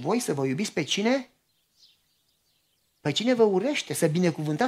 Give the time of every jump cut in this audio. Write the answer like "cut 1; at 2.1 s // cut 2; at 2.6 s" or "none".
none